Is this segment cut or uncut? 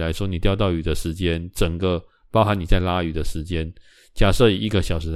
uncut